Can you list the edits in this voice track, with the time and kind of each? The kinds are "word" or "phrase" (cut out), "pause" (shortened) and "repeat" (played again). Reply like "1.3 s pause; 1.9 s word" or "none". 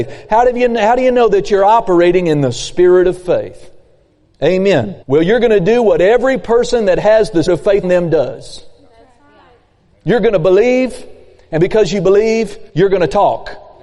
5.0 s pause; 7.5 s word; 7.8 s word; 12.7 s pause